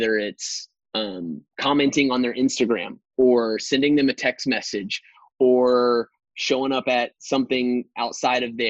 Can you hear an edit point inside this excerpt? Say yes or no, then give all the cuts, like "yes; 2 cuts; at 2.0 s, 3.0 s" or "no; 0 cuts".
no; 0 cuts